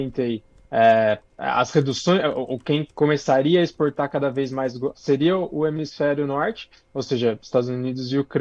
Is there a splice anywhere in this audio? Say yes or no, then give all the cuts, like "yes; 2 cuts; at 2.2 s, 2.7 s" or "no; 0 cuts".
yes; 1 cut; at 4.9 s